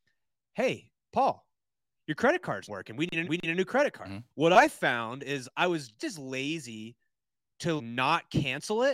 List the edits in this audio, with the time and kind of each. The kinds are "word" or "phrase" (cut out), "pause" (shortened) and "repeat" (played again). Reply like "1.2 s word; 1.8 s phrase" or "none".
2.7 s word; 3.2 s repeat; 4.3 s pause; 6.0 s word; 7.8 s word